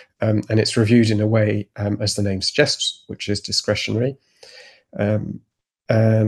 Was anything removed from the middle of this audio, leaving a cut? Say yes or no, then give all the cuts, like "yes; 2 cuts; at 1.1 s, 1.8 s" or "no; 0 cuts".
no; 0 cuts